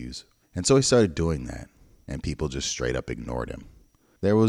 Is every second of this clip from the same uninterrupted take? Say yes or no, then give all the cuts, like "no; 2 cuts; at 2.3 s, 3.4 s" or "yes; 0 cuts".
yes; 0 cuts